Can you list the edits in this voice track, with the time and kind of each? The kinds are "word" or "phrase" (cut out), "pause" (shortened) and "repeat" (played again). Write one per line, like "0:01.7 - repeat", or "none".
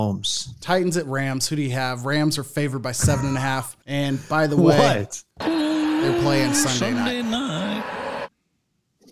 0:03.8 - pause
0:05.3 - pause